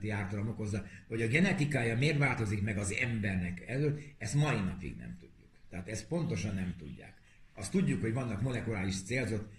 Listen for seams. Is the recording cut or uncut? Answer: uncut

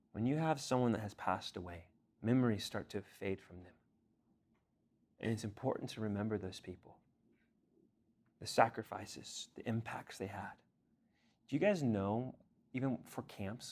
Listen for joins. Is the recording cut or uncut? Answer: cut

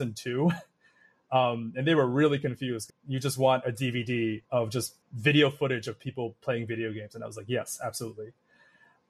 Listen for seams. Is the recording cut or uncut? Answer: cut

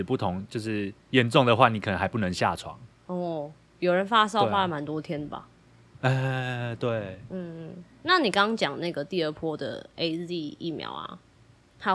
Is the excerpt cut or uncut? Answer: cut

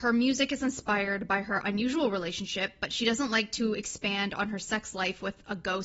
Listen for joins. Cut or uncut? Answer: uncut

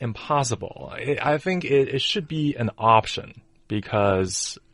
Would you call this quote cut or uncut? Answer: uncut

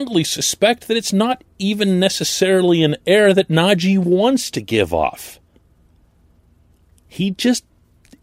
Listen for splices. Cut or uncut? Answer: uncut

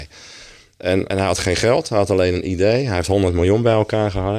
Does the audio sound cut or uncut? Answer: cut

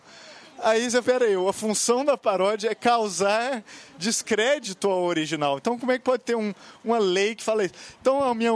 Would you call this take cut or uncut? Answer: cut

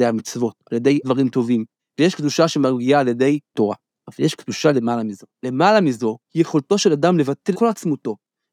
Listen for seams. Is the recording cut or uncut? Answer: cut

